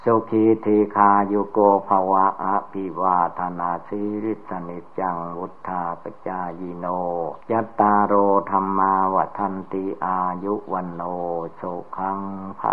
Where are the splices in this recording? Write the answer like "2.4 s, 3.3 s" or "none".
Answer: 7.4 s